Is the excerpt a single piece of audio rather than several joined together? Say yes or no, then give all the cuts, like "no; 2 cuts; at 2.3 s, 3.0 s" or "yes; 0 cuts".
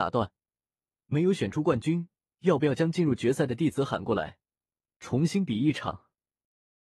yes; 0 cuts